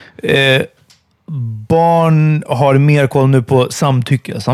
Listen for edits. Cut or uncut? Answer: uncut